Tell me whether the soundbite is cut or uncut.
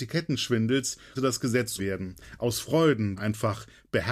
cut